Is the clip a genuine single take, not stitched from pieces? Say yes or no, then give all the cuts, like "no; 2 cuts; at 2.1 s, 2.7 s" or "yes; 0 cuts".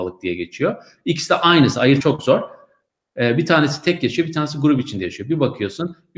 no; 1 cut; at 2.0 s